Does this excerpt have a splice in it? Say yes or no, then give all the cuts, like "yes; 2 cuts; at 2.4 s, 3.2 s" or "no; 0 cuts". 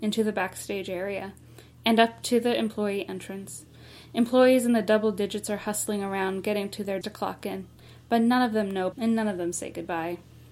yes; 2 cuts; at 7.0 s, 8.9 s